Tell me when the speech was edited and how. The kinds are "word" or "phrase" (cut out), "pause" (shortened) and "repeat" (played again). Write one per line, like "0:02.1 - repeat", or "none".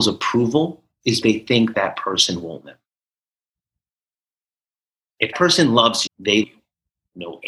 0:01.2 - word
0:01.7 - word
0:02.6 - word
0:05.3 - word
0:06.1 - word
0:06.4 - word